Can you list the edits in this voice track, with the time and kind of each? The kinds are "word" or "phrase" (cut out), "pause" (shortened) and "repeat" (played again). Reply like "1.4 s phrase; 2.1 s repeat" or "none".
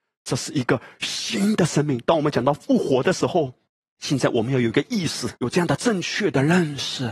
3.7 s pause; 5.4 s pause